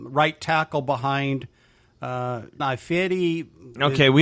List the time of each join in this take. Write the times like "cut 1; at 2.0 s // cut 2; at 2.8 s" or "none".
cut 1; at 2.6 s